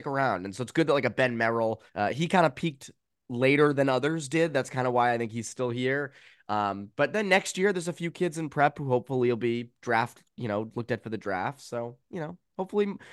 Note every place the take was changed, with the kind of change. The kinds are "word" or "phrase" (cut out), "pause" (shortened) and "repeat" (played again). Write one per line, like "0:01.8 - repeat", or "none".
0:01.9 - pause